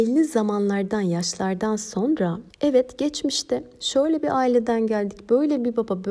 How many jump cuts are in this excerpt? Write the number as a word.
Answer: one